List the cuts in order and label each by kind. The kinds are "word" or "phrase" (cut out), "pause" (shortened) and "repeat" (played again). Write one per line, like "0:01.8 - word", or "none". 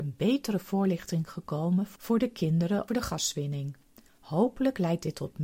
0:02.9 - word